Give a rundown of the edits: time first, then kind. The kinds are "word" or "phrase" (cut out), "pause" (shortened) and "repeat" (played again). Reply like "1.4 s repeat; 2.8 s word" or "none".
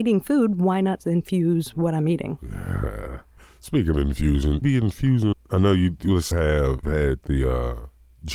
1.0 s word; 3.9 s word; 4.6 s word; 5.3 s word; 6.3 s word; 6.8 s word